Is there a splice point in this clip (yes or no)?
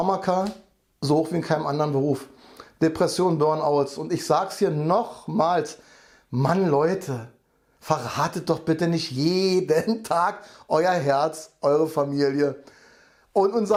no